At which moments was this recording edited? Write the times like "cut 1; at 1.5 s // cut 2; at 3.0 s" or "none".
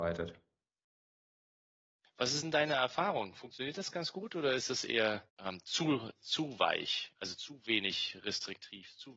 cut 1; at 5.3 s